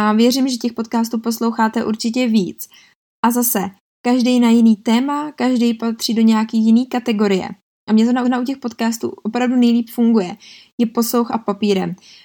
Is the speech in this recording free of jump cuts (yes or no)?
no